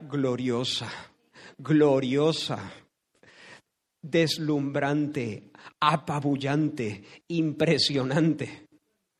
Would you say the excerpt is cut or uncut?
uncut